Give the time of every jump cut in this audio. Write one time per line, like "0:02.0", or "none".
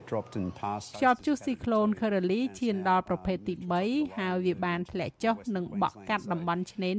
0:00.9